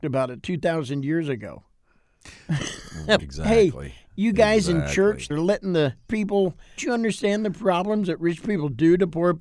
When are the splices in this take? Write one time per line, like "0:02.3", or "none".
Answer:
0:03.2
0:05.3
0:06.1
0:06.8